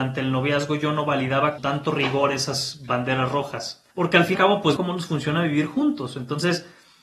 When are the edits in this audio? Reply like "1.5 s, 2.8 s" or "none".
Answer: 1.6 s, 3.9 s, 4.3 s, 4.8 s